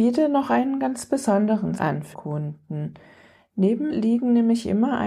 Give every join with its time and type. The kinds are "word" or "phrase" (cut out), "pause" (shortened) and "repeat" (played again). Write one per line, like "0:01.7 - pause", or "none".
0:01.8 - word
0:02.1 - word
0:03.9 - word